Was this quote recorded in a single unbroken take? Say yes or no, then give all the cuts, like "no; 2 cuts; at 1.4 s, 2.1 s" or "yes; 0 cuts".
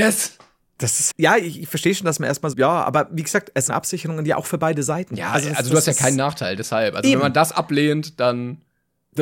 no; 3 cuts; at 1.1 s, 2.5 s, 3.7 s